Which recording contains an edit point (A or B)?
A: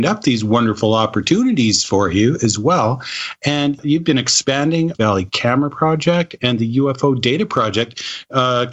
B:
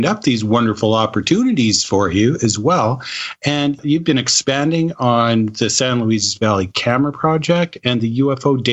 A